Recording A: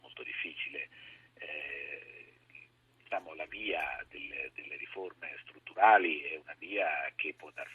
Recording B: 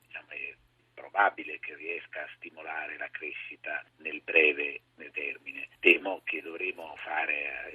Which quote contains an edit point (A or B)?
B